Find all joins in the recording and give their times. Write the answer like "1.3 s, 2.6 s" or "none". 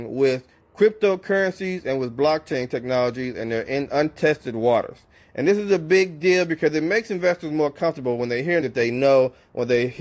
8.6 s